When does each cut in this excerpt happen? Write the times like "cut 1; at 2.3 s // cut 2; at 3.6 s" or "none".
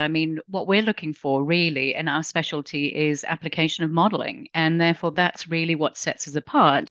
none